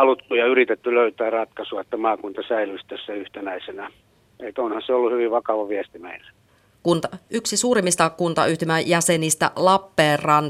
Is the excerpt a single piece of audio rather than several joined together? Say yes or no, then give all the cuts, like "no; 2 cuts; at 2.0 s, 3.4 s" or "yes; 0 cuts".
yes; 0 cuts